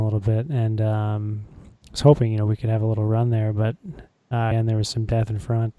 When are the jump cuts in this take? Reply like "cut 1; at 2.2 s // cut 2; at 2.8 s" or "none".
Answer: cut 1; at 4.5 s